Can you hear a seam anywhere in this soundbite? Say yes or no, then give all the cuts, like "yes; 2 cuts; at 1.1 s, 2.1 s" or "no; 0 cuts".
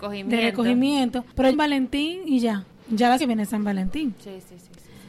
yes; 2 cuts; at 1.5 s, 3.2 s